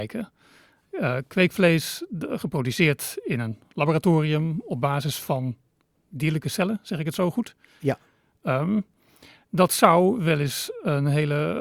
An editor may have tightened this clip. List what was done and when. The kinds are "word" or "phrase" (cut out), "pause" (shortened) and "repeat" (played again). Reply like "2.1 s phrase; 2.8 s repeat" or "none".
none